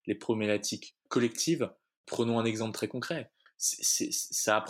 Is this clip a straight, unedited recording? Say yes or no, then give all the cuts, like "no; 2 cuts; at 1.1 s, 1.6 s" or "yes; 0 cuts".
yes; 0 cuts